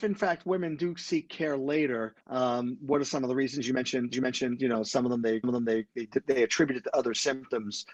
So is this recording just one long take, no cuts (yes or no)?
no